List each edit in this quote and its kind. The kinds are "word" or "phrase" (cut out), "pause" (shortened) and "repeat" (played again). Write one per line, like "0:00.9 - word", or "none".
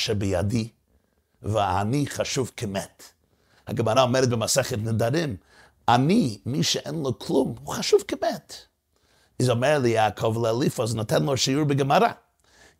none